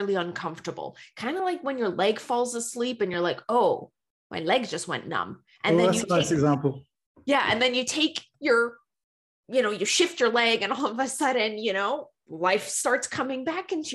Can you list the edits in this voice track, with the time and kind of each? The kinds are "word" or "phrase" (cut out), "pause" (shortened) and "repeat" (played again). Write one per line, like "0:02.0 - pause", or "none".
none